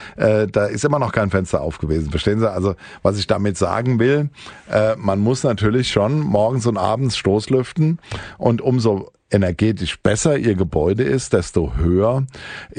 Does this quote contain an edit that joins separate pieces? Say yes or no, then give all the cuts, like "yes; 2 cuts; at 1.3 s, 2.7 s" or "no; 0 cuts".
no; 0 cuts